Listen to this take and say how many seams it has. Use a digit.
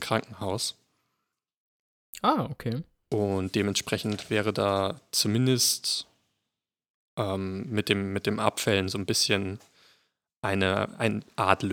0